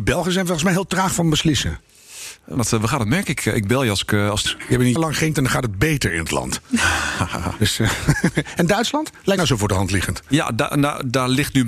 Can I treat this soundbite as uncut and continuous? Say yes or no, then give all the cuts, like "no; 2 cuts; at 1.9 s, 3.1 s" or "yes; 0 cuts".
no; 5 cuts; at 2.6 s, 4.5 s, 5.0 s, 5.3 s, 9.4 s